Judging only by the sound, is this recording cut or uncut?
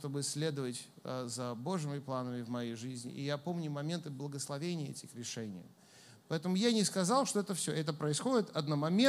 uncut